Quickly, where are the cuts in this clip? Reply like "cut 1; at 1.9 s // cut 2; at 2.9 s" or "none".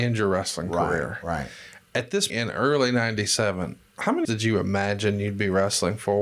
cut 1; at 2.3 s // cut 2; at 4.2 s